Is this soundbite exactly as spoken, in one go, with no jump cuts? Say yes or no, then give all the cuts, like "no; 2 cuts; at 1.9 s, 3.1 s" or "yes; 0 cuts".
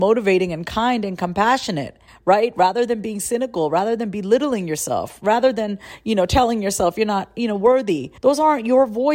no; 2 cuts; at 2.1 s, 8.2 s